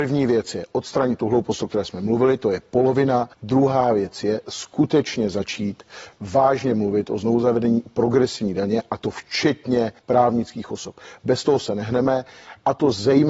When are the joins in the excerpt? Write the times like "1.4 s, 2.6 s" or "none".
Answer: 3.3 s, 10.0 s